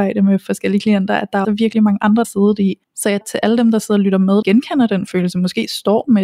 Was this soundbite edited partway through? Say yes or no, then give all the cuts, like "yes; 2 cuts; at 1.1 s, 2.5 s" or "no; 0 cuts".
yes; 5 cuts; at 1.4 s, 2.2 s, 2.8 s, 3.2 s, 4.4 s